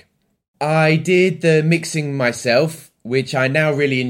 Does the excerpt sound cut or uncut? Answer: uncut